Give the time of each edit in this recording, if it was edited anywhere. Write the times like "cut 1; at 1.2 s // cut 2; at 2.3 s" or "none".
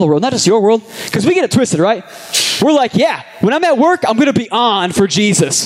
none